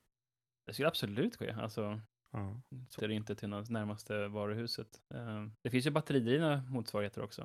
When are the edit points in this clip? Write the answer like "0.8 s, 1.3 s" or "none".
1.4 s, 2.1 s, 3.0 s, 5.6 s